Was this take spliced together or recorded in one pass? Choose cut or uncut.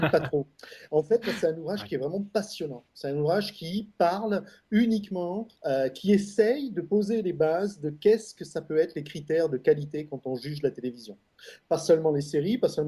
cut